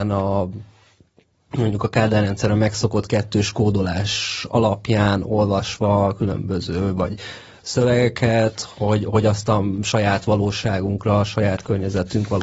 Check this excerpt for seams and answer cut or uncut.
uncut